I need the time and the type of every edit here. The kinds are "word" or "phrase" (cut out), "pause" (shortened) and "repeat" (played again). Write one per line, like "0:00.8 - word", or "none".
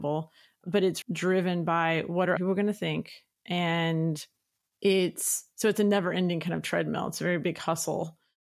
0:01.0 - word
0:02.4 - word